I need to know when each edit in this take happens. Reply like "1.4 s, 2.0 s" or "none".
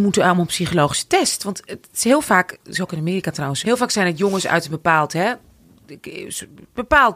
3.6 s